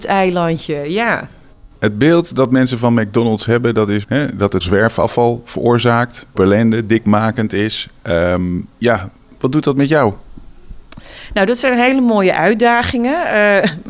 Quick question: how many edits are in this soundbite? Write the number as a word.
five